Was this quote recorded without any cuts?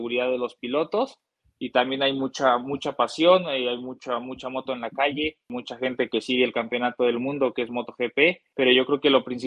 yes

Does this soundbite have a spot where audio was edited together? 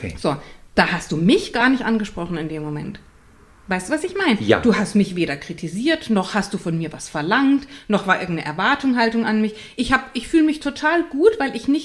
no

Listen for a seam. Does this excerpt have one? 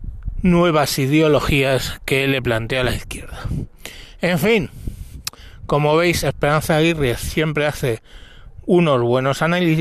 yes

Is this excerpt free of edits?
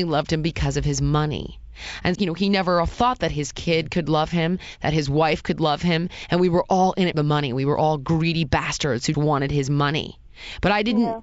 no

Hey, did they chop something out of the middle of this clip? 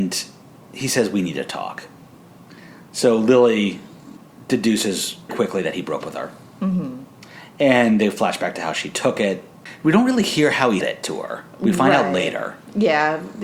yes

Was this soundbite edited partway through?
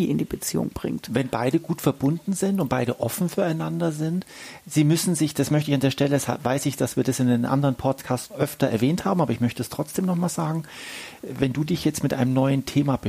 yes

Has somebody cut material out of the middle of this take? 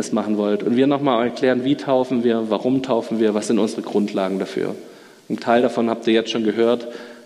no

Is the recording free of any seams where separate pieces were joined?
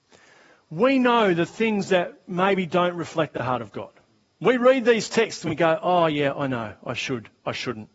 yes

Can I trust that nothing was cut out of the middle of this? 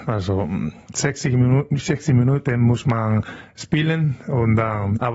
yes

